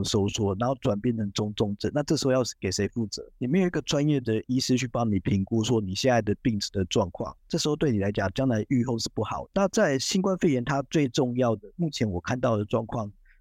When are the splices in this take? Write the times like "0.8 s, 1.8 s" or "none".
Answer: 7.4 s